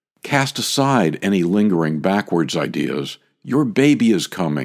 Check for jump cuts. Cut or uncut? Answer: uncut